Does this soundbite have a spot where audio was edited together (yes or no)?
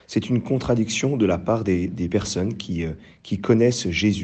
no